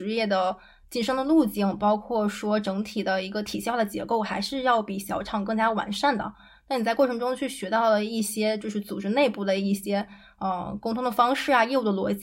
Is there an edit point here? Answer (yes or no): no